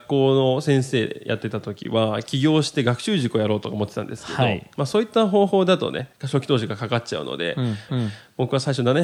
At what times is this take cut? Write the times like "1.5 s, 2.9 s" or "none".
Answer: 6.1 s, 7.9 s